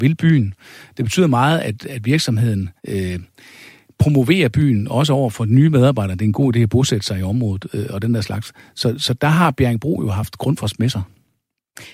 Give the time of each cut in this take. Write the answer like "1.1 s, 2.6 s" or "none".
2.8 s